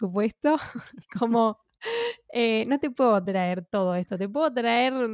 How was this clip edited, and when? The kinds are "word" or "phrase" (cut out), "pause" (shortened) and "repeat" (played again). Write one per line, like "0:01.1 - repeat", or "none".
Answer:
none